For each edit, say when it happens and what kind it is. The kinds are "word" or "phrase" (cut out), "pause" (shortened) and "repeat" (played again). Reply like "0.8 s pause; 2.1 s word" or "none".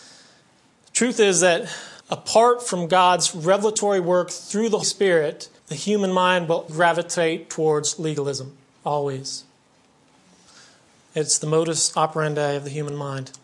2.0 s pause; 4.8 s word; 5.6 s pause; 6.7 s word